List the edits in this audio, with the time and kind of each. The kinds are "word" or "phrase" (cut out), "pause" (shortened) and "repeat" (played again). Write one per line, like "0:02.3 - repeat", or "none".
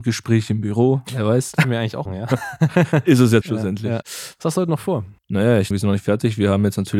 0:01.6 - word
0:02.1 - word
0:03.4 - word
0:04.0 - word
0:05.2 - pause
0:05.7 - word